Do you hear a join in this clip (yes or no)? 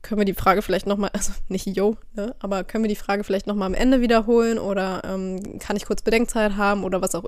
no